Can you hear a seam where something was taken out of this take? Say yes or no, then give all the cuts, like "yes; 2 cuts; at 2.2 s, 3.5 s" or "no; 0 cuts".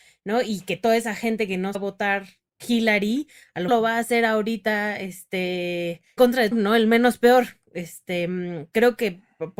yes; 5 cuts; at 1.7 s, 2.6 s, 3.7 s, 6.2 s, 6.5 s